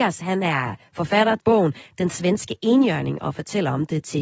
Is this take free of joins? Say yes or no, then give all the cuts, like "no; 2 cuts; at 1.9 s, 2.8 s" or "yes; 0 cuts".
no; 1 cut; at 1.4 s